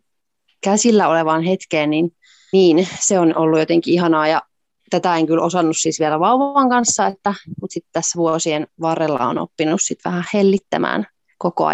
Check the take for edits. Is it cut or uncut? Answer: cut